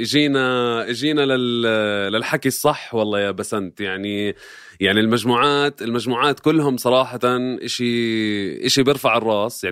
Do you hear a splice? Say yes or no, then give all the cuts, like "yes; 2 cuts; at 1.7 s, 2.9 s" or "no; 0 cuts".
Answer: no; 0 cuts